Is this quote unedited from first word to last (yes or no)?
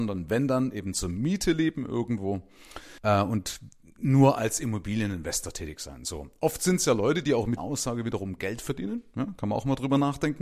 no